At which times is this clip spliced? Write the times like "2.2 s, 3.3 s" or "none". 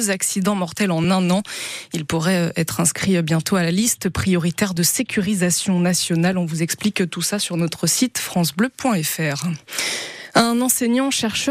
none